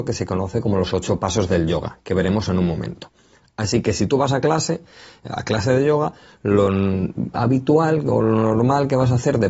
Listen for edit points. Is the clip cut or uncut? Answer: uncut